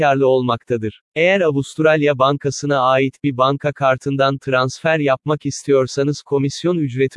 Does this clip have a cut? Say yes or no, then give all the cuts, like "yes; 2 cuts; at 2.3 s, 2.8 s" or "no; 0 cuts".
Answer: yes; 1 cut; at 1.1 s